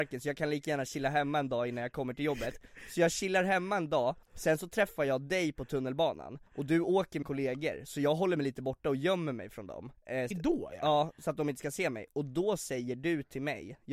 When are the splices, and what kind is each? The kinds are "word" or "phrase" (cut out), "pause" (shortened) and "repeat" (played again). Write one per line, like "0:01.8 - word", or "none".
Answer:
0:04.2 - pause
0:06.5 - pause
0:07.2 - word
0:09.9 - word
0:10.3 - word